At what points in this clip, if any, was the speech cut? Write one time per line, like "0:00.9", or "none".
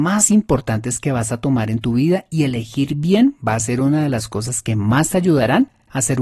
none